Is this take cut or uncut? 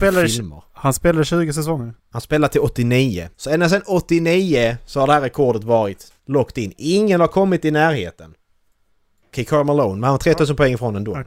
cut